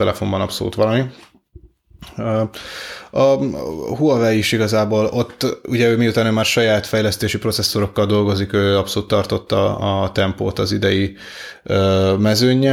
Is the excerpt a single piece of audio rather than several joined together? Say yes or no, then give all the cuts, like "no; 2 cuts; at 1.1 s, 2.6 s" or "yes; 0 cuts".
yes; 0 cuts